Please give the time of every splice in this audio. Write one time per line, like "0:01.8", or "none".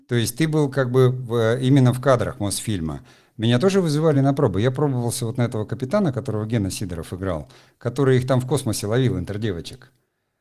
none